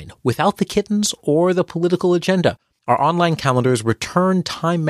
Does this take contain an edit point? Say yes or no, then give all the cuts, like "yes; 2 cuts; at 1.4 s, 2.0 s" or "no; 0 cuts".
no; 0 cuts